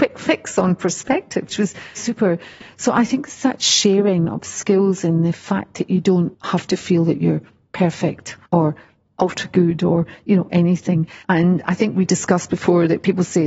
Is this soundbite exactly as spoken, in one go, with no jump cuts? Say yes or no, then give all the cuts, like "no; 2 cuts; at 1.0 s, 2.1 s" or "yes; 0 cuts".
no; 5 cuts; at 1.5 s, 2.0 s, 6.3 s, 8.5 s, 11.2 s